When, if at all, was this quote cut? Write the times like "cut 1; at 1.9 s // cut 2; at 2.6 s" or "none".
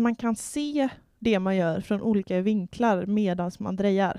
none